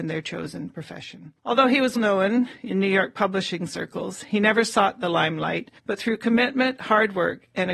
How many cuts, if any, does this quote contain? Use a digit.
3